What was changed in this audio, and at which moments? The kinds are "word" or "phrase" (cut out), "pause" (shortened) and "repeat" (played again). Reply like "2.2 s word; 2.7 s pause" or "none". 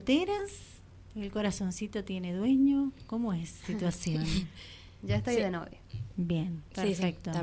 3.6 s word